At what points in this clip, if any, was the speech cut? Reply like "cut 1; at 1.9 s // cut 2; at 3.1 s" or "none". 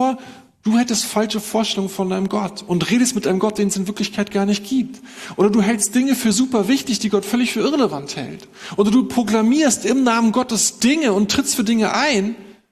none